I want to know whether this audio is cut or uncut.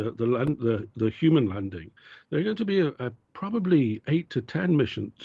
uncut